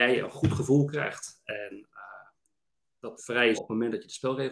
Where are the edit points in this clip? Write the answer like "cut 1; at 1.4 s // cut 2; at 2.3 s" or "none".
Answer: cut 1; at 3.2 s // cut 2; at 3.5 s